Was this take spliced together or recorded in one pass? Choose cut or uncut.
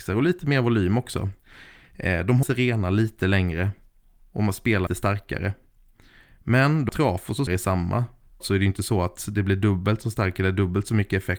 cut